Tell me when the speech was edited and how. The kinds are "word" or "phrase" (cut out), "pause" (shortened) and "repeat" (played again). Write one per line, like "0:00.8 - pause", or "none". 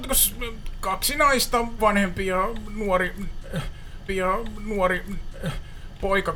0:01.8 - word
0:04.1 - repeat